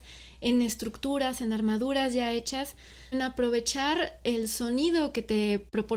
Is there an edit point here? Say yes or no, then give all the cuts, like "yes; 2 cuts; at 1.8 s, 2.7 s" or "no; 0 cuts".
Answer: yes; 1 cut; at 3.1 s